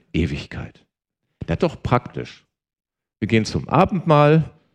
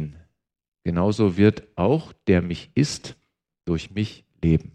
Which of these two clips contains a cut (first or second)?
first